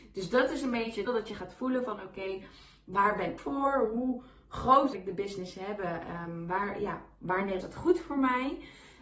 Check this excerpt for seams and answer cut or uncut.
cut